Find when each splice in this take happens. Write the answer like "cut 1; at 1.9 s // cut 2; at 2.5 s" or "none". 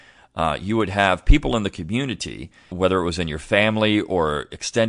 cut 1; at 2.7 s